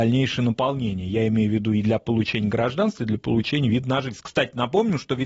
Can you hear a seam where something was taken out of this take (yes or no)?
no